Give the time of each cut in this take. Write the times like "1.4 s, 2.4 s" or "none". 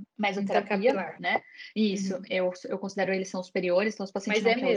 none